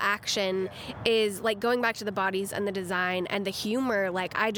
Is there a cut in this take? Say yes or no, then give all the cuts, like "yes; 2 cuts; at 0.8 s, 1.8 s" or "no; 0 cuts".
no; 0 cuts